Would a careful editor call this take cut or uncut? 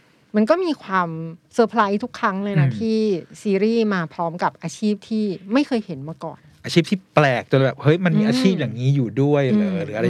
cut